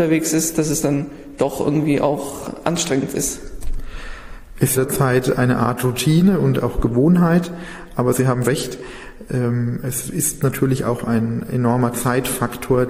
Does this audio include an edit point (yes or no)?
yes